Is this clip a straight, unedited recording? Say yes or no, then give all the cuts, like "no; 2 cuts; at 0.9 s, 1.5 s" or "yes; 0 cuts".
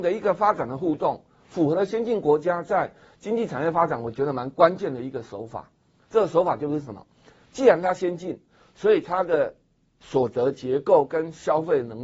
yes; 0 cuts